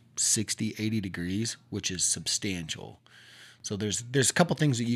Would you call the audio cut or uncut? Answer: uncut